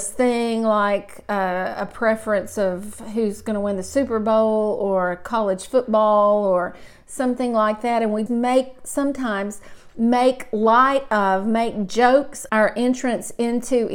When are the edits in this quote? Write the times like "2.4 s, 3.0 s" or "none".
8.3 s, 12.5 s